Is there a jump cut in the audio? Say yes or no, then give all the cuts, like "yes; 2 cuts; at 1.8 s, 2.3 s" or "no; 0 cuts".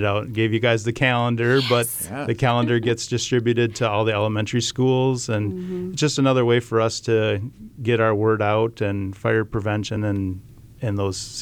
no; 0 cuts